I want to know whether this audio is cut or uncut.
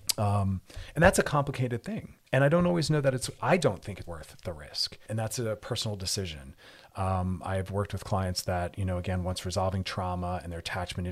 cut